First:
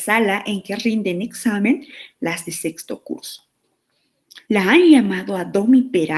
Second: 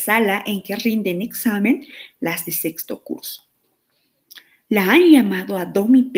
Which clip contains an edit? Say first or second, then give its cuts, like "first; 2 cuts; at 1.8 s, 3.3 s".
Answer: first; 1 cut; at 4.4 s